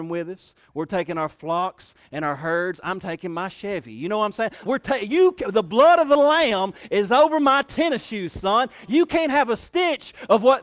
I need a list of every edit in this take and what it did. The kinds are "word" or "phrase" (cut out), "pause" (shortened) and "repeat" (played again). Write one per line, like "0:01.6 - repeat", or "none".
0:04.7 - word